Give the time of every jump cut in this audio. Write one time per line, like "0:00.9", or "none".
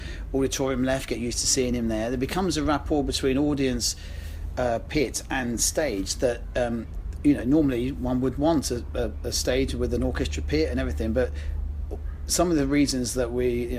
none